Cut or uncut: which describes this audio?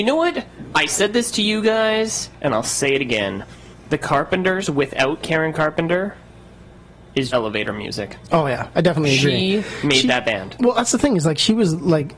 cut